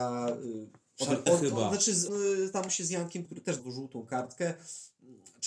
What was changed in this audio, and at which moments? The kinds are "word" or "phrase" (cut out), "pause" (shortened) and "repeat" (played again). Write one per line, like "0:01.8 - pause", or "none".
0:01.3 - word
0:02.1 - word
0:02.7 - word
0:03.3 - word
0:03.6 - word